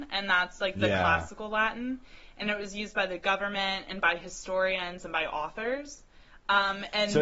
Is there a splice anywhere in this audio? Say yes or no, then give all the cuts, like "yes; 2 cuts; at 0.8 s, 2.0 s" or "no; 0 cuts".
no; 0 cuts